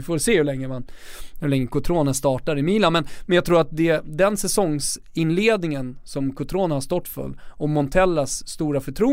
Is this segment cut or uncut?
uncut